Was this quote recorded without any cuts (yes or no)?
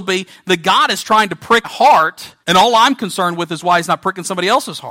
no